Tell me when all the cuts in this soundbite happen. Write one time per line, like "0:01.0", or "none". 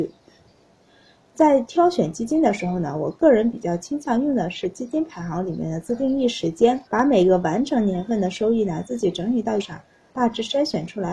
0:06.9
0:09.6

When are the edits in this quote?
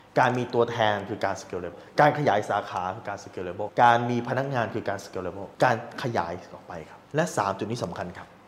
0:01.7
0:03.7
0:05.5
0:07.1

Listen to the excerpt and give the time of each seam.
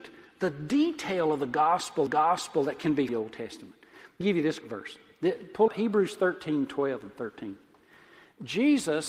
0:02.1
0:03.1
0:04.2
0:04.6
0:05.7
0:07.8

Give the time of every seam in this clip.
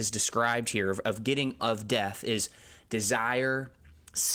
0:01.6

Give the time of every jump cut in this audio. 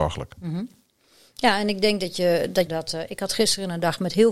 0:02.7

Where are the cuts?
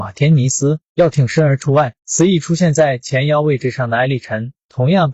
0:02.0

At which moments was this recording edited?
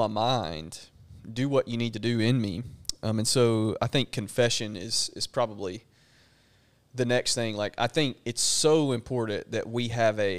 none

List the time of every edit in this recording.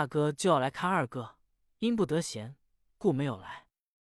none

